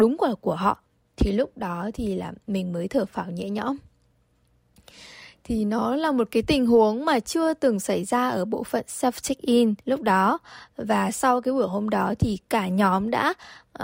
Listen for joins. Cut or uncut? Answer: cut